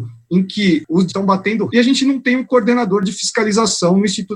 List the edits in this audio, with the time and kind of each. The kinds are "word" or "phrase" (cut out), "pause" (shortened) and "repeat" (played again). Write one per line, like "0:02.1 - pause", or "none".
0:01.1 - word
0:01.7 - word